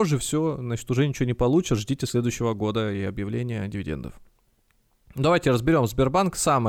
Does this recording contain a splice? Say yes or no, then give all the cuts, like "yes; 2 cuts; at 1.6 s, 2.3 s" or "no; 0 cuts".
no; 0 cuts